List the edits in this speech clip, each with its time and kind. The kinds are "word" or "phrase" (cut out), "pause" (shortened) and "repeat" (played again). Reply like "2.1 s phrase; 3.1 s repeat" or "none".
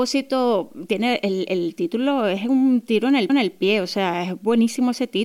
3.3 s repeat